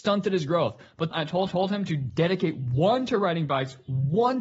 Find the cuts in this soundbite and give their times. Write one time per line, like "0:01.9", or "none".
0:01.1
0:01.5